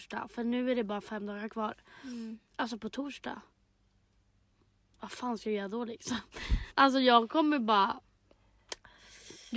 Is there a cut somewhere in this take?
yes; 1 cut; at 6.7 s

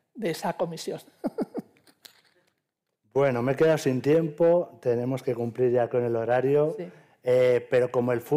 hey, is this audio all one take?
yes; 0 cuts

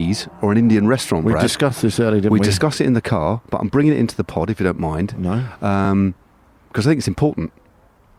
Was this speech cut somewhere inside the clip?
no; 0 cuts

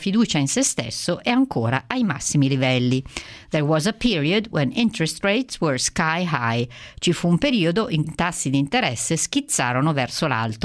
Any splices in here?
yes; 1 cut; at 8.0 s

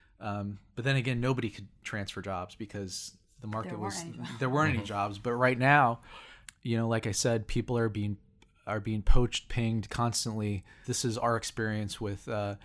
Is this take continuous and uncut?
yes; 0 cuts

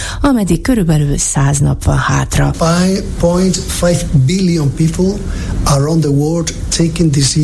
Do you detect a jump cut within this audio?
no; 0 cuts

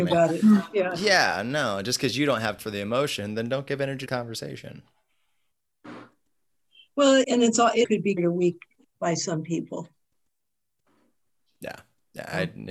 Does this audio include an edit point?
yes; 6 cuts; at 2.6 s, 4.1 s, 7.2 s, 7.8 s, 8.2 s, 8.8 s

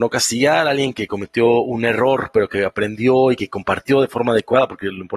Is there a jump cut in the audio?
no; 0 cuts

